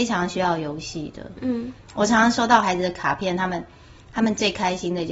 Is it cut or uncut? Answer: uncut